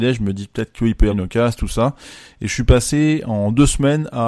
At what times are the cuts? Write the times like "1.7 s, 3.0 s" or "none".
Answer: 1.1 s